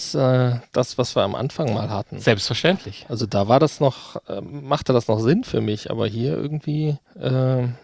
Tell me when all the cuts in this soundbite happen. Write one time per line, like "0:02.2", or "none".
none